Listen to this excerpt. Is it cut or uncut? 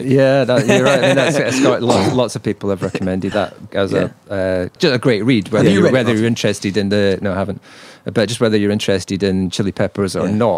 cut